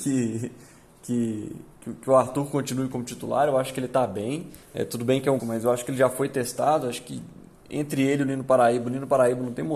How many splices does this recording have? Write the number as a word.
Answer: two